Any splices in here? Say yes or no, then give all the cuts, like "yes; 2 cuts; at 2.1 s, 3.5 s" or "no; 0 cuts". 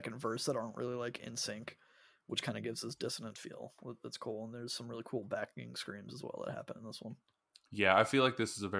no; 0 cuts